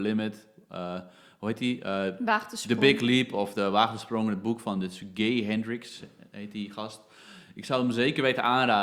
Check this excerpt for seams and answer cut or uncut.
uncut